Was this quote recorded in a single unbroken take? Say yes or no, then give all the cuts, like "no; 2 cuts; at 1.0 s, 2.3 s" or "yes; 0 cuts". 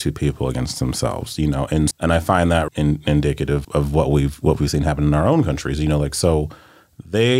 no; 3 cuts; at 1.9 s, 2.7 s, 3.6 s